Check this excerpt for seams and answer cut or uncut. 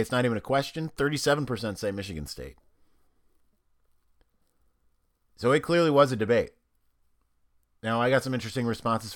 uncut